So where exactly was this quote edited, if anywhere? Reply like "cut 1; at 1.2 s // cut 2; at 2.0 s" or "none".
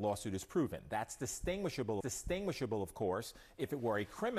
cut 1; at 2.0 s